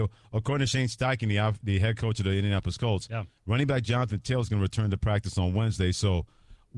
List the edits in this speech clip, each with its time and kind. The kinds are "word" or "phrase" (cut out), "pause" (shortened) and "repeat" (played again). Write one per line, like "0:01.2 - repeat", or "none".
none